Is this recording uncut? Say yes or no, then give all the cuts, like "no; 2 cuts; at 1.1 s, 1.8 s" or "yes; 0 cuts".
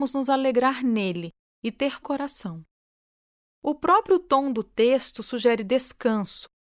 no; 1 cut; at 2.0 s